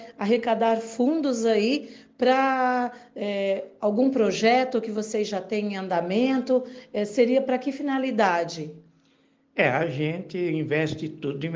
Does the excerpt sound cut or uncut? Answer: uncut